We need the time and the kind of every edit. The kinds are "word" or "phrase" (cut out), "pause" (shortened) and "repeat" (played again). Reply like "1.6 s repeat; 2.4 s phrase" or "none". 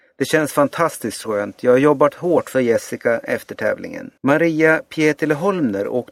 2.5 s phrase; 4.2 s pause